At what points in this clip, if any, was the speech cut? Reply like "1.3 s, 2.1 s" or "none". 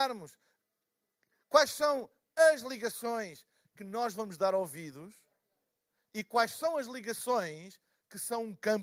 none